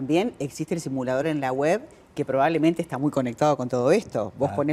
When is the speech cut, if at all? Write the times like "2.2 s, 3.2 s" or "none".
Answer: none